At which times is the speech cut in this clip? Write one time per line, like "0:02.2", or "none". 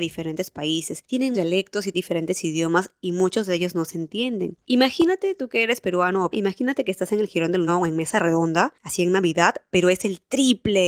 0:01.3
0:01.9
0:06.3
0:07.7